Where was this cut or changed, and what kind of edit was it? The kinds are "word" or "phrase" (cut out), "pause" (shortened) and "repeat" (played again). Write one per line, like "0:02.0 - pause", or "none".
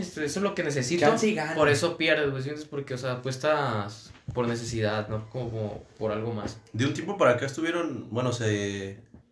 none